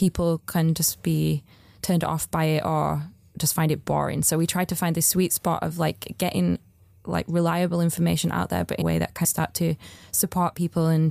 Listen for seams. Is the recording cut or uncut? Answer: cut